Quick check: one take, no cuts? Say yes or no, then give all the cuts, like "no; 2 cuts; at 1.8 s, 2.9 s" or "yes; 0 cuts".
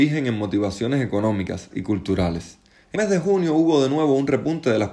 no; 2 cuts; at 1.7 s, 3.0 s